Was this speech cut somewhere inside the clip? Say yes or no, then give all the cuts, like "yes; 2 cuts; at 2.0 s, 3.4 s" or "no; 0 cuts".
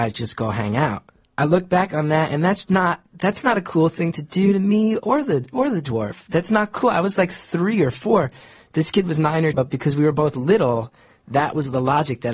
yes; 2 cuts; at 1.2 s, 9.5 s